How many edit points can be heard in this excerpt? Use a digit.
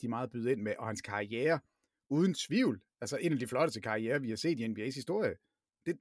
0